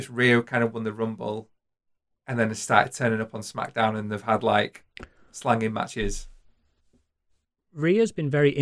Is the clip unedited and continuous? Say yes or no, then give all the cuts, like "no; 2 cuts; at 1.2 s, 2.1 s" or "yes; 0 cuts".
yes; 0 cuts